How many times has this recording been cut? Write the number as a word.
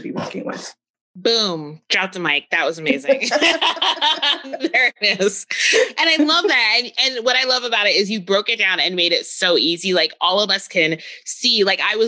zero